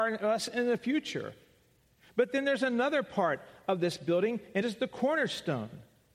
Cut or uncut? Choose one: cut